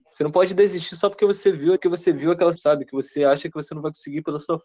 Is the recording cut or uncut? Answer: cut